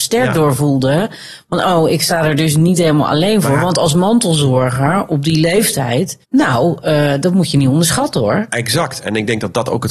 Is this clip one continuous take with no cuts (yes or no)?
no